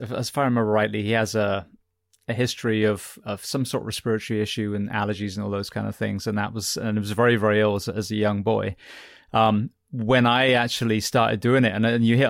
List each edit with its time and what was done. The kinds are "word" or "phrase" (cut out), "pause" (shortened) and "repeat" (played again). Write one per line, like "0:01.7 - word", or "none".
none